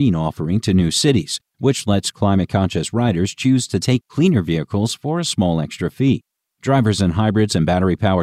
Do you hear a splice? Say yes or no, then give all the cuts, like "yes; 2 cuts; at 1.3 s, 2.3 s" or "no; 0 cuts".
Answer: no; 0 cuts